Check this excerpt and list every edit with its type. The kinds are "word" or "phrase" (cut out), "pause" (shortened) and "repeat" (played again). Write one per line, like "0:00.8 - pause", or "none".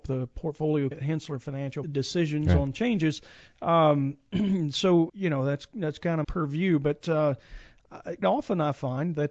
0:00.9 - word
0:01.8 - word
0:05.1 - word
0:06.2 - word
0:08.2 - word